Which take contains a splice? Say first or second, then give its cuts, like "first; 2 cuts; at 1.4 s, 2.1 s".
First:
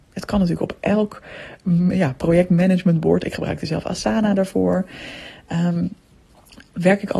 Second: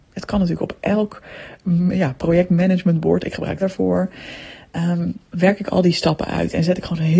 second; 2 cuts; at 3.6 s, 5.2 s